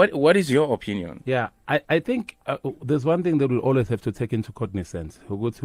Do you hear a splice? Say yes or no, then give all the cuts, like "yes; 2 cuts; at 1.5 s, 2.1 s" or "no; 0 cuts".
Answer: no; 0 cuts